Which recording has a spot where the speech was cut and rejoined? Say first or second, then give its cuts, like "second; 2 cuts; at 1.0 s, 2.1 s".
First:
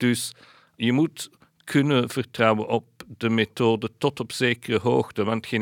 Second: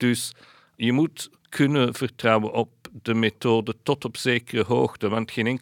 second; 1 cut; at 1.4 s